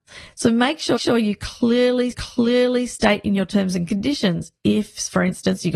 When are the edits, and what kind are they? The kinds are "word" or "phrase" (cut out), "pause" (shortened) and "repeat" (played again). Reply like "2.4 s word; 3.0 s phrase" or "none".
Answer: 1.0 s repeat; 2.1 s repeat